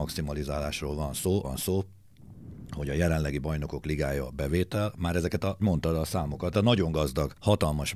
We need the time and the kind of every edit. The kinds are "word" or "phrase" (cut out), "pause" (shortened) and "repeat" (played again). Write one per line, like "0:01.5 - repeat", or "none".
0:01.4 - word
0:05.6 - word
0:06.5 - word

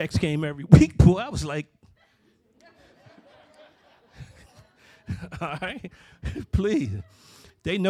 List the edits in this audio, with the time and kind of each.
none

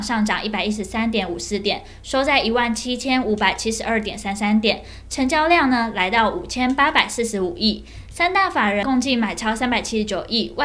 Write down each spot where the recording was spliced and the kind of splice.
none

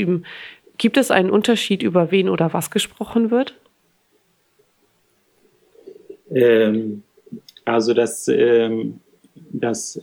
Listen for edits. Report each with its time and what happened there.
none

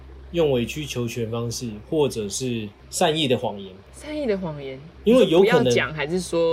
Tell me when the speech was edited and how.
0:05.0 - word

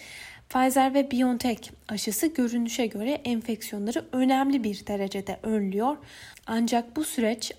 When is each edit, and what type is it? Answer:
none

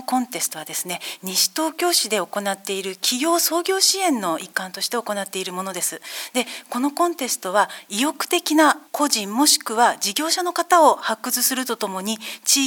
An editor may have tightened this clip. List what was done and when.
0:08.9 - pause

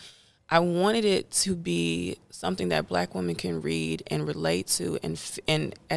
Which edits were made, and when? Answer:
none

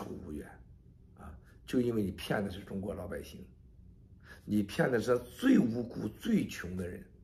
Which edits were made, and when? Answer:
none

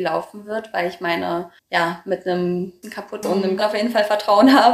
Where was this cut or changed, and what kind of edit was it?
0:01.6 - pause
0:02.8 - phrase
0:03.2 - word
0:03.6 - phrase

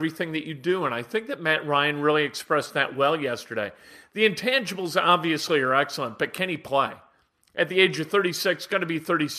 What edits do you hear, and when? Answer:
none

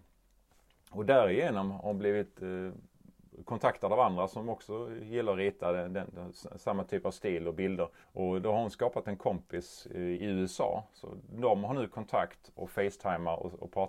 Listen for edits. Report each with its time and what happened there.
0:08.0 - pause

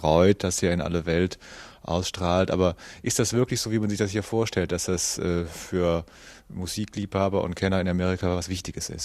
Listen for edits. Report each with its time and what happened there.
none

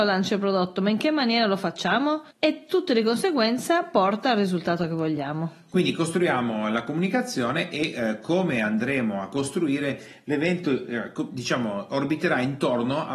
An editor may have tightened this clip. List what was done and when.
0:02.3 - pause

